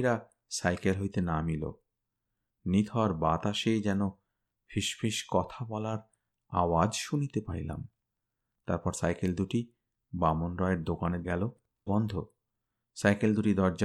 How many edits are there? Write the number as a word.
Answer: two